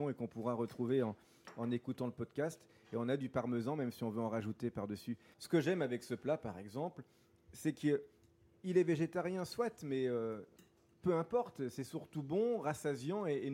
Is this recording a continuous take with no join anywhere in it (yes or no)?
yes